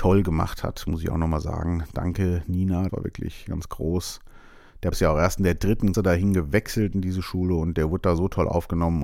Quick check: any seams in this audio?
yes; 3 cuts; at 2.9 s, 4.9 s, 5.9 s

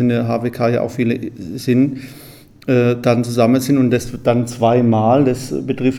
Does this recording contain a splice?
no; 0 cuts

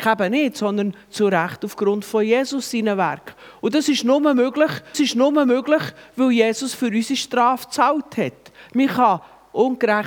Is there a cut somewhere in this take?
yes; 1 cut; at 4.9 s

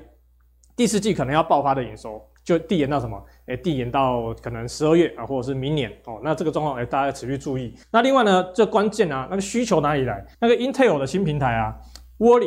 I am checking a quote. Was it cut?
yes; 2 cuts; at 7.8 s, 10.3 s

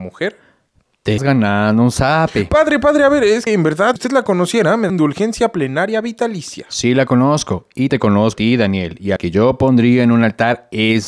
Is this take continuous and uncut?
no; 7 cuts; at 1.2 s, 3.5 s, 4.0 s, 4.9 s, 7.9 s, 8.3 s, 9.2 s

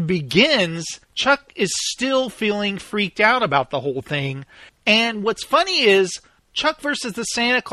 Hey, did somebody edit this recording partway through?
yes; 1 cut; at 1.0 s

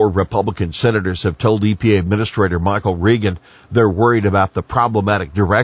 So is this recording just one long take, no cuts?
yes; 0 cuts

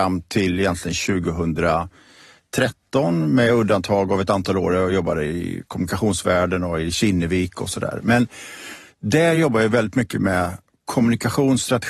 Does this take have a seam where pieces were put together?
no; 0 cuts

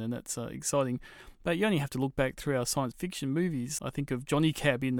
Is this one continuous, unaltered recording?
yes; 0 cuts

